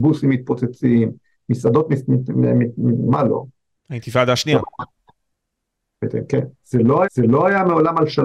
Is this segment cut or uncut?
cut